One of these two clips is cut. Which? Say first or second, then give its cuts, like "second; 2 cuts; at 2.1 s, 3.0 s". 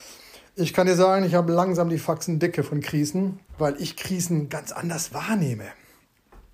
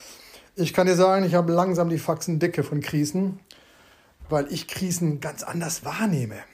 first; 1 cut; at 3.5 s